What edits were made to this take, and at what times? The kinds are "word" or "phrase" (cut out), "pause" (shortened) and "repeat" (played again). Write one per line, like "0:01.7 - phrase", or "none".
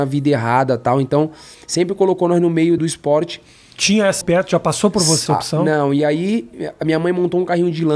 0:02.8 - word
0:04.2 - word
0:05.3 - word